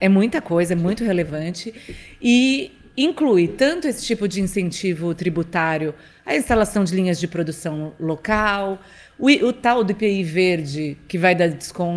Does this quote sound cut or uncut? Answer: uncut